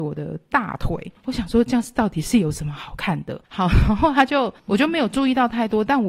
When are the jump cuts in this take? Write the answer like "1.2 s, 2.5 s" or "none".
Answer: 4.6 s